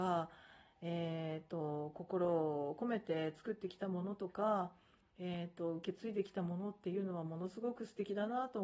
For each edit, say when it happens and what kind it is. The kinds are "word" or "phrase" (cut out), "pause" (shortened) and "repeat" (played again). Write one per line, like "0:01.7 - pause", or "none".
none

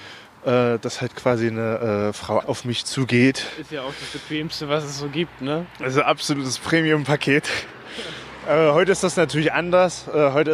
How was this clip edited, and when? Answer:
0:02.4 - word

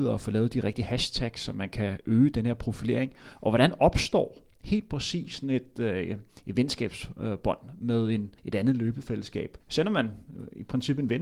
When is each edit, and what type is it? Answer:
0:08.4 - pause
0:09.6 - pause

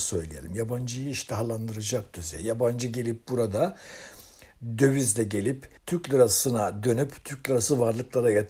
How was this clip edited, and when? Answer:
0:05.8 - pause

